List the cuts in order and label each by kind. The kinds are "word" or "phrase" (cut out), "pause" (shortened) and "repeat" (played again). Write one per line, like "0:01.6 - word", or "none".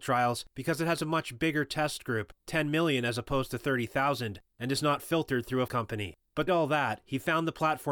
0:05.7 - word
0:06.5 - word